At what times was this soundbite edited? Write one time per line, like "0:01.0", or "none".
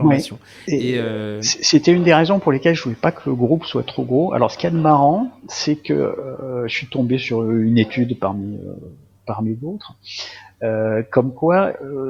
none